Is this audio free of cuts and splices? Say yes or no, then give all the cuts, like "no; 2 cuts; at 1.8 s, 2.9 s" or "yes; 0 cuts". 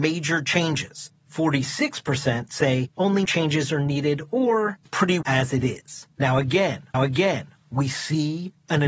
no; 5 cuts; at 3.2 s, 4.9 s, 5.2 s, 6.1 s, 6.9 s